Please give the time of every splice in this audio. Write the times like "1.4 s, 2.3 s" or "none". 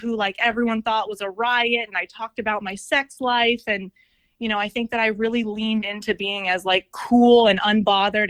none